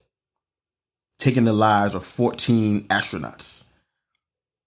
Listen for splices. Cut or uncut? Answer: uncut